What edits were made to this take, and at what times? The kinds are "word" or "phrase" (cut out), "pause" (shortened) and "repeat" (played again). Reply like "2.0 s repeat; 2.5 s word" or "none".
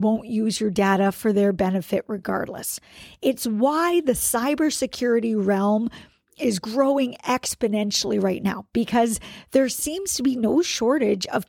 none